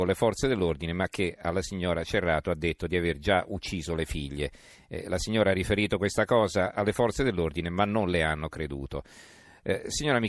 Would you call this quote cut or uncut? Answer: uncut